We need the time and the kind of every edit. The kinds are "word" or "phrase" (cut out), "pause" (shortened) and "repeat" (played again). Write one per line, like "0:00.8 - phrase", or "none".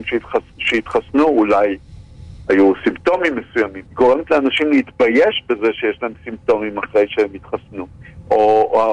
0:03.9 - pause